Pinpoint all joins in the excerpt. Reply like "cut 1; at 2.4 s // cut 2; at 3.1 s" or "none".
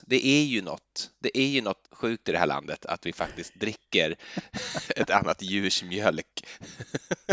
cut 1; at 1.8 s